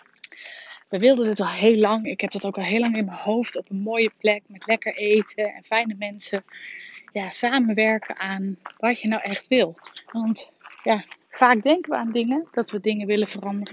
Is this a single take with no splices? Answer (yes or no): no